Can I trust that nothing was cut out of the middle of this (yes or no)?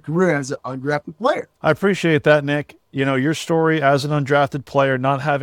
no